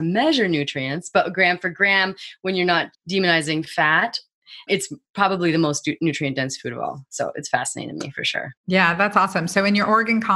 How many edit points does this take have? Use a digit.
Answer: 1